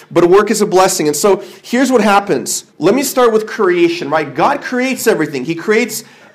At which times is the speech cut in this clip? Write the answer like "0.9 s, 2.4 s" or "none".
2.7 s